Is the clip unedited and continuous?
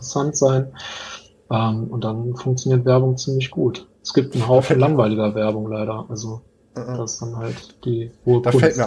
no; 1 cut; at 4.0 s

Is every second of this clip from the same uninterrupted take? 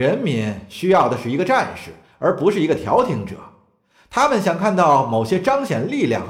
yes; 0 cuts

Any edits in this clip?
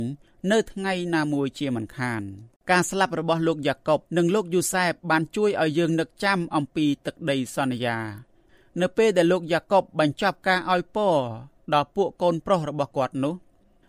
yes; 2 cuts; at 2.6 s, 4.1 s

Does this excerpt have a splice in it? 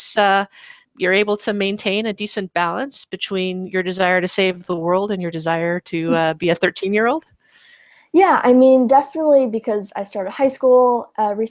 no; 0 cuts

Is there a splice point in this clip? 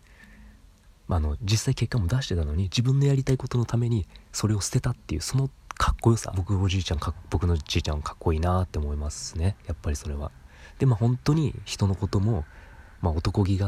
yes; 1 cut; at 6.3 s

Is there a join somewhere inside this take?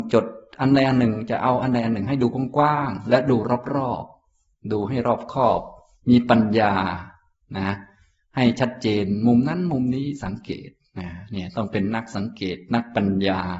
no; 0 cuts

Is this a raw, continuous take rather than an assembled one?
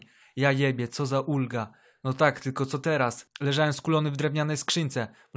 yes; 0 cuts

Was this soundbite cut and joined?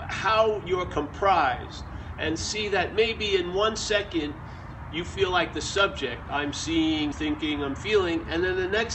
yes; 1 cut; at 7.1 s

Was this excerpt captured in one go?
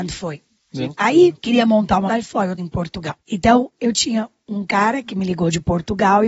no; 3 cuts; at 2.1 s, 2.6 s, 3.2 s

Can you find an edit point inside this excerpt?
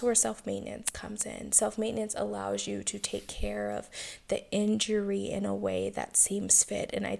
no; 0 cuts

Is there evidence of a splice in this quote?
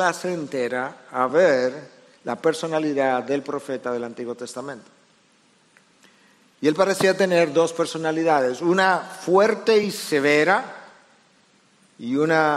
no; 0 cuts

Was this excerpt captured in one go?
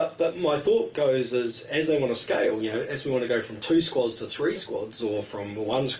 yes; 0 cuts

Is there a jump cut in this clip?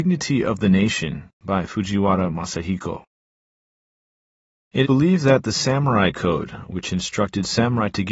yes; 1 cut; at 4.8 s

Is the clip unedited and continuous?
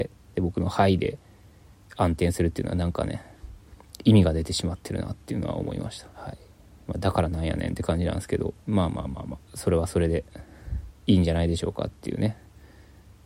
no; 3 cuts; at 6.1 s, 8.6 s, 10.9 s

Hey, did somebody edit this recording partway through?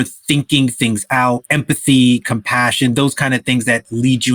no; 0 cuts

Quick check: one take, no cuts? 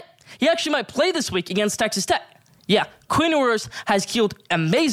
yes; 0 cuts

